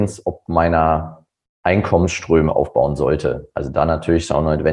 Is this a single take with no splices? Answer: no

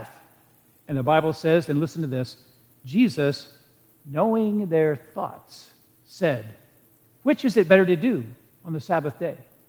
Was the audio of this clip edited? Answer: no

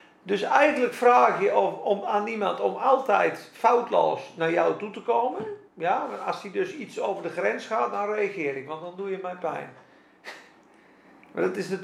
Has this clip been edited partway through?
yes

